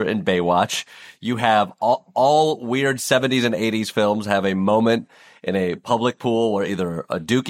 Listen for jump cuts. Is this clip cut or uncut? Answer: uncut